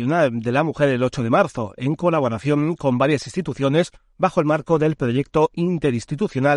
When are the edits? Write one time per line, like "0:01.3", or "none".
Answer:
none